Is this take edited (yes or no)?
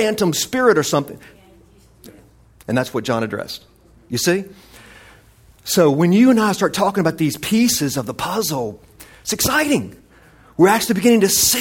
no